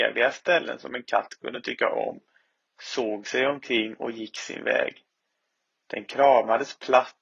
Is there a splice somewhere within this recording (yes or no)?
no